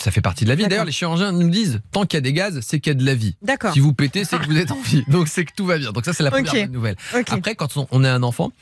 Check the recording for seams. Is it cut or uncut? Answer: uncut